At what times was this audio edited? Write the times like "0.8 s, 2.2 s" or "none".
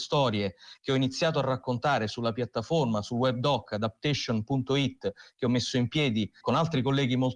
none